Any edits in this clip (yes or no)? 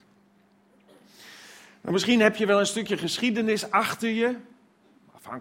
no